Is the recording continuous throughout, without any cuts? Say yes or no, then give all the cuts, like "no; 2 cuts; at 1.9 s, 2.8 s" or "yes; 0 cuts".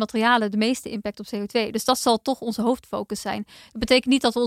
yes; 0 cuts